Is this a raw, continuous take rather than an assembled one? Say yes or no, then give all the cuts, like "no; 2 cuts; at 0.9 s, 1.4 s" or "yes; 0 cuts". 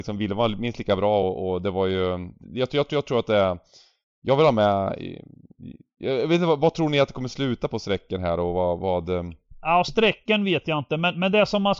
yes; 0 cuts